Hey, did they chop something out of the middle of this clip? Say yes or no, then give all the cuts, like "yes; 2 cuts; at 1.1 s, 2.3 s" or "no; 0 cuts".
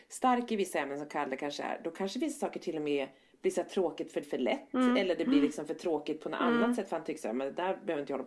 yes; 1 cut; at 4.2 s